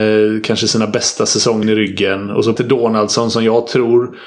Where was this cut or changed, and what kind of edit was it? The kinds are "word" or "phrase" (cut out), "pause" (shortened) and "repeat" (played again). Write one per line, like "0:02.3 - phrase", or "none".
0:01.6 - word
0:02.6 - word